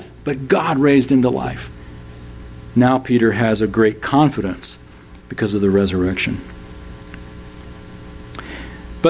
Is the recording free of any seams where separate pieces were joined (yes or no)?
no